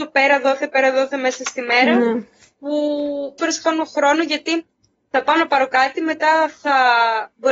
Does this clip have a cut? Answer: yes; 1 cut; at 3.4 s

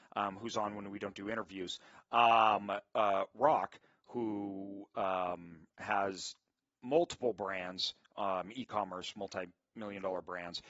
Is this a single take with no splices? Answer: yes; 0 cuts

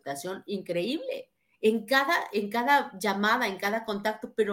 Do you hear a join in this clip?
no; 0 cuts

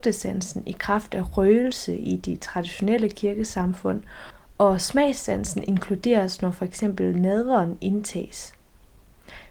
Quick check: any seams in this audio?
no; 0 cuts

